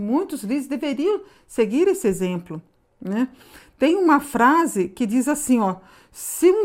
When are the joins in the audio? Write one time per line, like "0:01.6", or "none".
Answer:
none